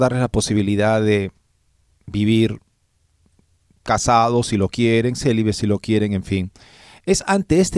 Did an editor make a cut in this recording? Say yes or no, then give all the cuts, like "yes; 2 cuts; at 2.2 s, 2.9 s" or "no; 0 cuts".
no; 0 cuts